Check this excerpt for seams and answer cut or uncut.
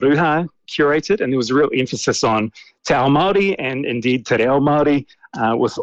uncut